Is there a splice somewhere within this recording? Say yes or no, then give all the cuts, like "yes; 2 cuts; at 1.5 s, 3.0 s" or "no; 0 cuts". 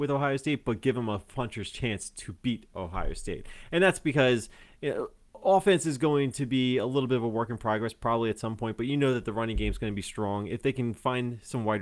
no; 0 cuts